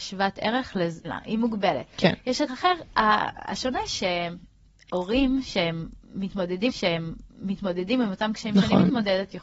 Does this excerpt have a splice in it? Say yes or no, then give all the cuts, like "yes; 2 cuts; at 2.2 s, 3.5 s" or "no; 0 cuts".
yes; 3 cuts; at 1.0 s, 2.5 s, 6.7 s